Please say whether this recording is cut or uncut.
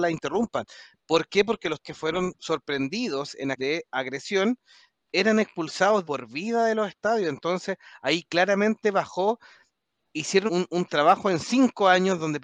cut